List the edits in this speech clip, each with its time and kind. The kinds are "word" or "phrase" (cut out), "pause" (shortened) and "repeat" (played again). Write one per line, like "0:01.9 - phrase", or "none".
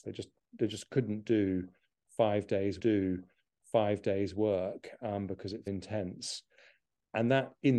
0:02.8 - repeat
0:05.7 - word